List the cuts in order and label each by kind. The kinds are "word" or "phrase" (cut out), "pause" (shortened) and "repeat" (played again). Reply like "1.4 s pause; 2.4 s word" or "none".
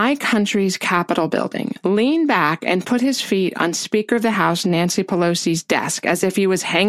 none